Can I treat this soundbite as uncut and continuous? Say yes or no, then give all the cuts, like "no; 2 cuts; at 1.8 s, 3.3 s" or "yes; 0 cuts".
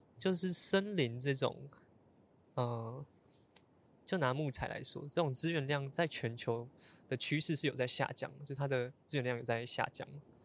yes; 0 cuts